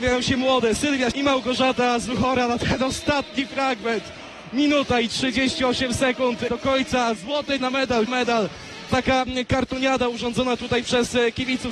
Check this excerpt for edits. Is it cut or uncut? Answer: cut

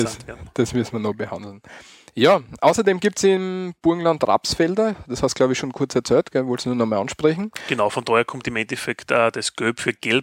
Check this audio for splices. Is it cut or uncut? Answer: uncut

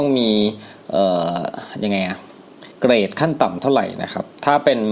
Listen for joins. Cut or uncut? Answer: cut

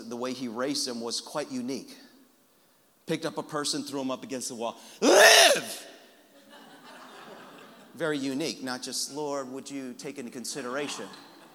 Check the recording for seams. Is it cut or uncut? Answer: uncut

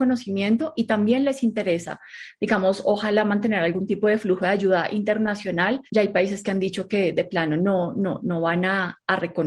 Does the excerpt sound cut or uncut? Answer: cut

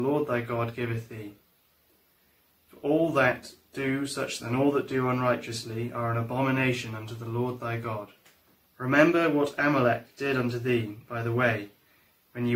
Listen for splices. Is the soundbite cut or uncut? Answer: cut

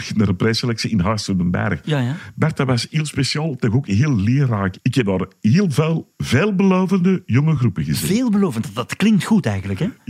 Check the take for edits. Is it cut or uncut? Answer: uncut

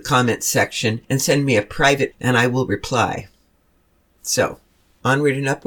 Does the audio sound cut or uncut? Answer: cut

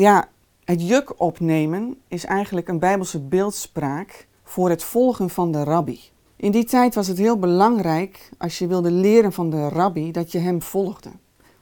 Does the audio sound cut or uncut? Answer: cut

